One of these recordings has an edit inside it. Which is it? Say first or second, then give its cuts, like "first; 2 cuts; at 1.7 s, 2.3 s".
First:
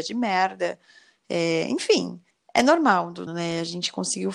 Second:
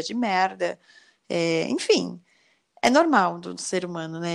first; 2 cuts; at 2.3 s, 3.3 s